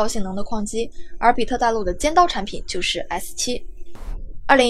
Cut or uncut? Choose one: uncut